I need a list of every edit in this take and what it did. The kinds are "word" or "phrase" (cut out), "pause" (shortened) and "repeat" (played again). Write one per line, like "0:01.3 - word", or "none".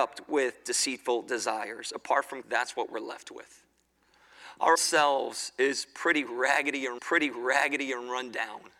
0:02.4 - phrase
0:04.7 - word
0:07.0 - repeat